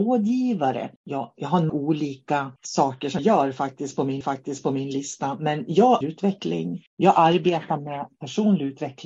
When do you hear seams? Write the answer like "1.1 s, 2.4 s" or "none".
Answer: 1.0 s, 1.7 s, 2.6 s, 3.2 s, 4.2 s, 6.0 s, 6.9 s